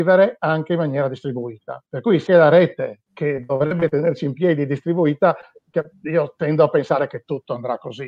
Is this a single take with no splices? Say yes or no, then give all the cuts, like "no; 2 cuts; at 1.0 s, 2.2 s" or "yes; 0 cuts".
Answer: no; 3 cuts; at 1.9 s, 2.3 s, 3.1 s